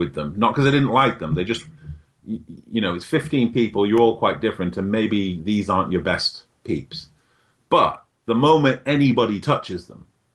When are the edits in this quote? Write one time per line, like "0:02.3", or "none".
none